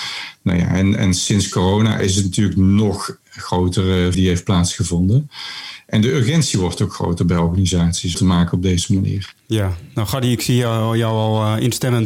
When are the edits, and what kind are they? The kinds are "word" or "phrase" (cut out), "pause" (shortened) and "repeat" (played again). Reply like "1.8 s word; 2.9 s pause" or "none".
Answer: 4.1 s word; 8.1 s phrase